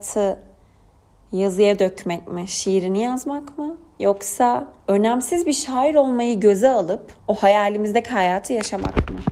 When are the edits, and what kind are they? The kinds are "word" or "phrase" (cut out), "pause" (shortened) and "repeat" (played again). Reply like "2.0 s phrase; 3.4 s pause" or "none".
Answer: 4.8 s pause; 7.2 s pause

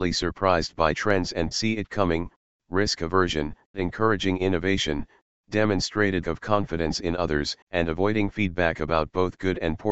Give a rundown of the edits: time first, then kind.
1.5 s phrase; 3.7 s word; 6.2 s word; 7.6 s pause

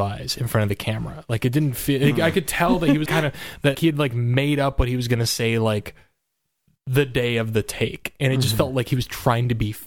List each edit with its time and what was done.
3.1 s word; 3.7 s word

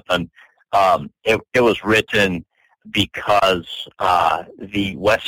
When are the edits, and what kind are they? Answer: none

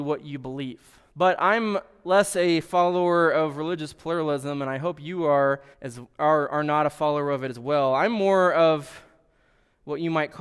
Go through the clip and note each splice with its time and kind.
1.1 s pause; 5.7 s pause

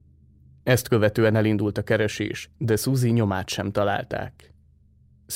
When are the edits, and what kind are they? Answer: none

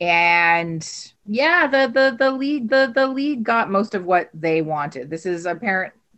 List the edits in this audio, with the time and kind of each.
1.2 s pause; 2.7 s repeat

